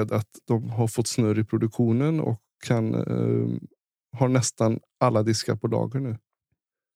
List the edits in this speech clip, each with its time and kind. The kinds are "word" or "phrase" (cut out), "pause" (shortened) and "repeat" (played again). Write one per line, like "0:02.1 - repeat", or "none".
none